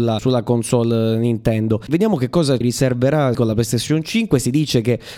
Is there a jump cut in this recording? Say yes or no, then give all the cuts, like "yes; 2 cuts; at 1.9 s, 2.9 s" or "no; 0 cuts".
yes; 3 cuts; at 1.9 s, 2.6 s, 3.3 s